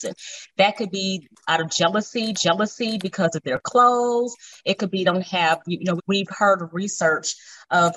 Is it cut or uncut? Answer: cut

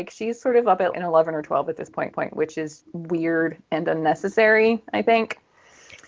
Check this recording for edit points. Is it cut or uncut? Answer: cut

